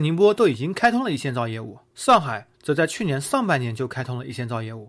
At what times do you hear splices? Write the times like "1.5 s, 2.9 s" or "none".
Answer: 2.5 s